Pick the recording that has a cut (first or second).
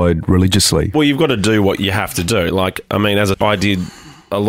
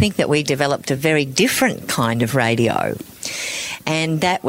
first